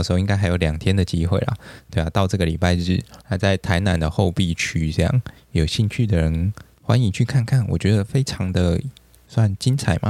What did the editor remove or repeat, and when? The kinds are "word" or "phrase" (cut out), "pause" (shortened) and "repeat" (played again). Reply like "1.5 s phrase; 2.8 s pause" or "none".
3.2 s pause